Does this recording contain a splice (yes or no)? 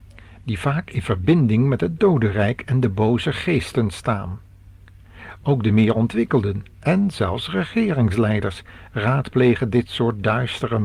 no